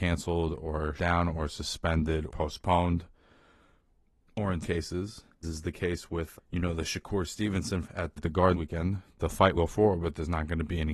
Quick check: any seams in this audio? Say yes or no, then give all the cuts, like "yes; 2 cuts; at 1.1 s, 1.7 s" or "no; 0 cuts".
yes; 9 cuts; at 1.0 s, 2.3 s, 4.6 s, 5.4 s, 6.4 s, 7.8 s, 8.2 s, 8.5 s, 9.5 s